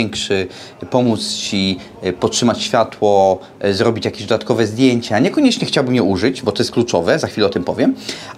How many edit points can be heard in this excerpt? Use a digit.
0